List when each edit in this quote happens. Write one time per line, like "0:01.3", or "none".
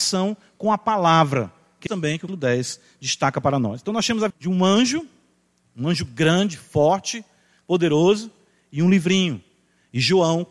0:01.9
0:02.3
0:04.3